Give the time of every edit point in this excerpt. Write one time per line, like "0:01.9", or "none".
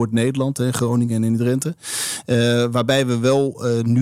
none